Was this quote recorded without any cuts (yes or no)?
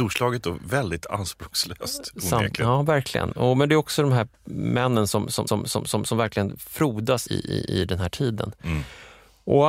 no